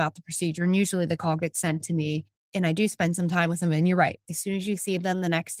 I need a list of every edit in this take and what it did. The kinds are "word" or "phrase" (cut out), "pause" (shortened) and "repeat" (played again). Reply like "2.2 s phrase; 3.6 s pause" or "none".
none